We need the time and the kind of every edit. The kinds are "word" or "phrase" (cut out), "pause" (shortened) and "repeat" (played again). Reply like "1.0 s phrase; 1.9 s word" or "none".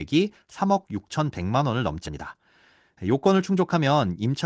2.0 s word